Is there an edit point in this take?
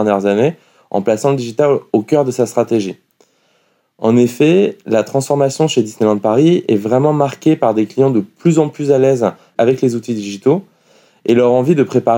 no; 0 cuts

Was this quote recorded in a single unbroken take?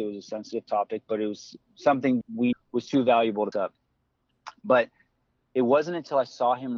no; 3 cuts; at 2.2 s, 2.5 s, 3.5 s

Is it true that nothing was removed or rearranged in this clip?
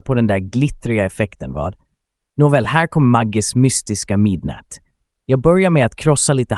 yes; 0 cuts

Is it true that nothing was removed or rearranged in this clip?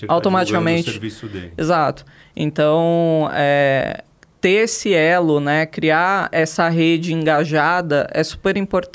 no; 1 cut; at 6.3 s

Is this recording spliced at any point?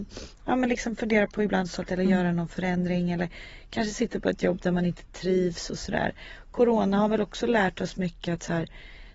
yes; 1 cut; at 1.9 s

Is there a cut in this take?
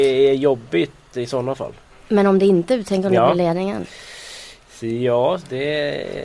no; 0 cuts

